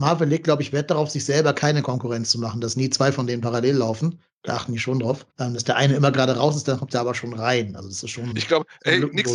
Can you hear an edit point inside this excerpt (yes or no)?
yes